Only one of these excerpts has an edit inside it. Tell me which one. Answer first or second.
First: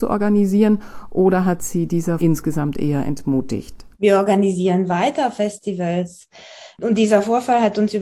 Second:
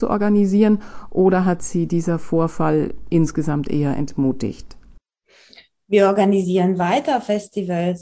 first